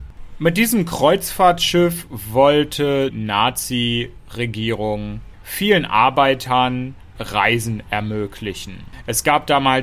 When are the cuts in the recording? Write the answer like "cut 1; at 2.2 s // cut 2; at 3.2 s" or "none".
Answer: cut 1; at 3.1 s // cut 2; at 7.2 s

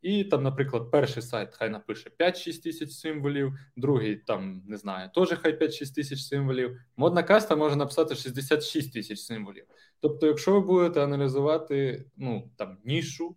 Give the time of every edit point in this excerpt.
none

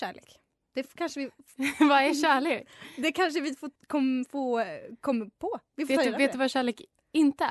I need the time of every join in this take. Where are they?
cut 1; at 3.8 s // cut 2; at 5.7 s

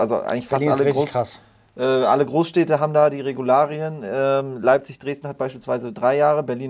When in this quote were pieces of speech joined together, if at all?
none

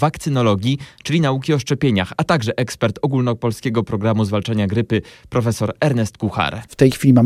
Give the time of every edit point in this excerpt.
none

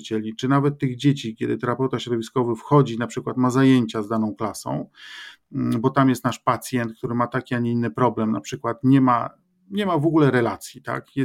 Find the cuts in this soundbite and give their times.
none

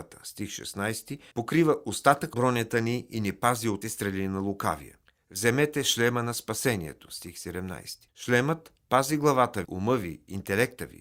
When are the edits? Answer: cut 1; at 1.3 s // cut 2; at 2.3 s // cut 3; at 3.8 s // cut 4; at 5.1 s // cut 5; at 8.1 s // cut 6; at 9.6 s

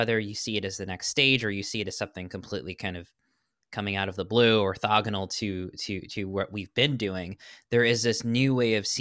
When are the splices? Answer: none

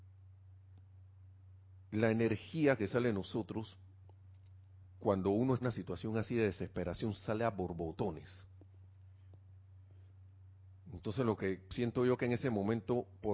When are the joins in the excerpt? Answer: cut 1; at 4.9 s // cut 2; at 5.6 s

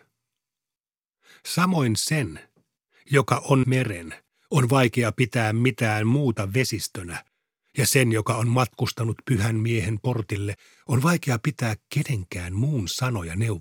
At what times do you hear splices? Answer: cut 1; at 3.6 s

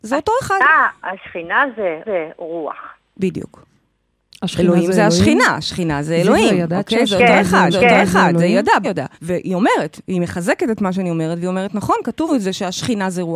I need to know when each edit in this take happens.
cut 1; at 2.0 s // cut 2; at 7.7 s // cut 3; at 8.8 s // cut 4; at 9.1 s // cut 5; at 12.3 s

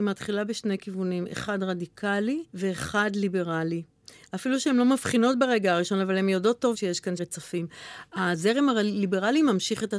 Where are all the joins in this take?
cut 1; at 2.5 s // cut 2; at 6.7 s // cut 3; at 7.2 s

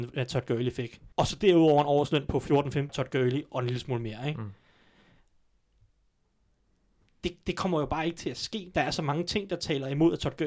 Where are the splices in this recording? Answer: cut 1; at 1.1 s // cut 2; at 2.9 s

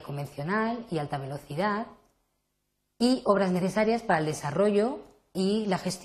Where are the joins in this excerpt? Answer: none

